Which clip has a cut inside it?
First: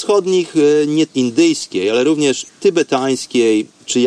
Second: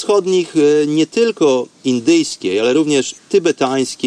first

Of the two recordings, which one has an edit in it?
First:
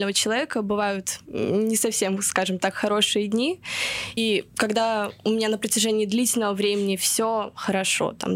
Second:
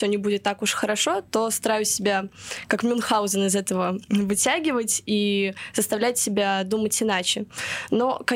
first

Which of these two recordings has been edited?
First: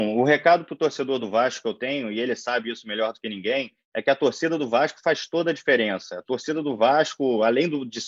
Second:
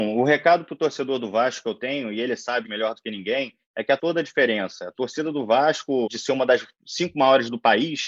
second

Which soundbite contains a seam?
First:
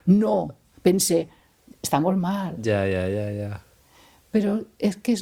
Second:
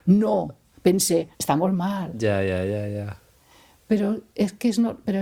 second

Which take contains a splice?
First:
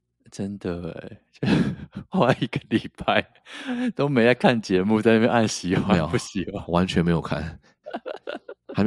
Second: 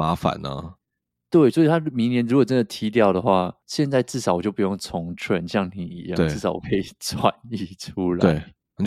second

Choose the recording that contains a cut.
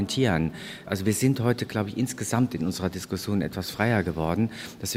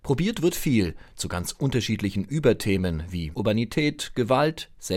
second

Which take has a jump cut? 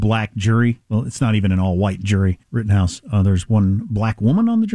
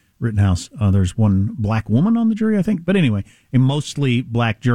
first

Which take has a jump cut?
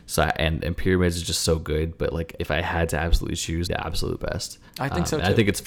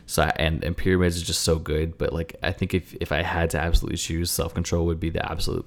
first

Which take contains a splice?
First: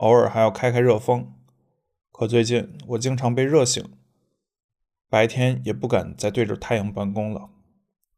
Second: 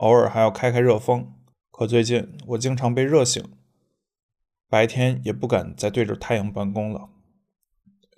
second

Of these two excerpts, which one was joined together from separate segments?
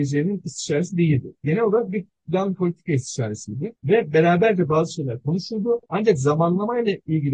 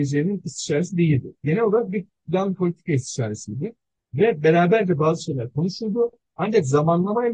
first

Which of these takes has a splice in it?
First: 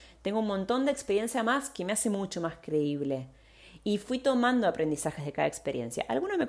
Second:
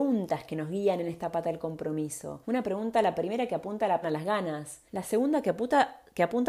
second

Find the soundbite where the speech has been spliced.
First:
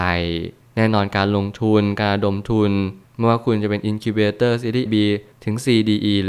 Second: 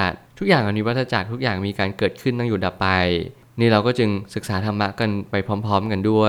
first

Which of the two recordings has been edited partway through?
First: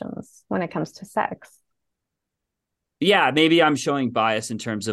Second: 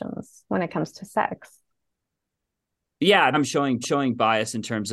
second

